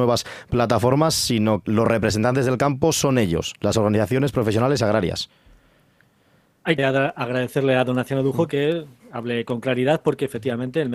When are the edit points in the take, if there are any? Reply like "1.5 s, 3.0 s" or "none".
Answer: 1.7 s, 6.8 s